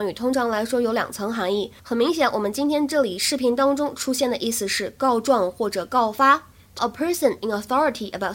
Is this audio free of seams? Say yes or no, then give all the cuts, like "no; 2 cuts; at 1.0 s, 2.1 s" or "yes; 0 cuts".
no; 2 cuts; at 1.8 s, 6.8 s